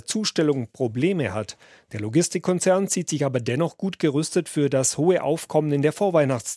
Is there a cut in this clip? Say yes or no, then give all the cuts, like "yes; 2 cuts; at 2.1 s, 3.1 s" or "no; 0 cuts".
no; 0 cuts